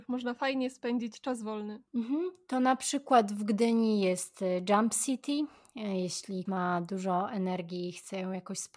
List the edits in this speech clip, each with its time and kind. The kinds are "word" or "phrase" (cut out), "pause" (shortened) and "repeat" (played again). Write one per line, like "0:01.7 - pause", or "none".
0:01.9 - pause
0:06.5 - word